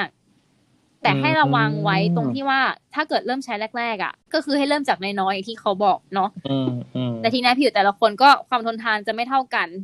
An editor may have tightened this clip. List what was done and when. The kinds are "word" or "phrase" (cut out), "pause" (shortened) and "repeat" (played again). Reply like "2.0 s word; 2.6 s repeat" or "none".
6.1 s pause